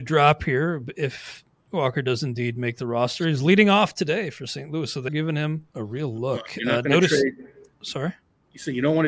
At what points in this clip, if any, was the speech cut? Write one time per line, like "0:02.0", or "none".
0:05.1
0:05.7
0:07.7